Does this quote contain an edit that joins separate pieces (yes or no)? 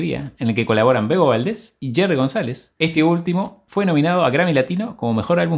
no